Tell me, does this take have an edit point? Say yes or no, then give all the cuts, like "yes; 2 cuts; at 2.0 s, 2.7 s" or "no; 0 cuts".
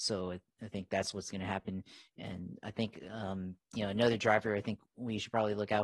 no; 0 cuts